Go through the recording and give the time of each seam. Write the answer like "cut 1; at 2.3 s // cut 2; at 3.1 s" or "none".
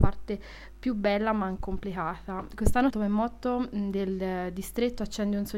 cut 1; at 1.6 s // cut 2; at 2.9 s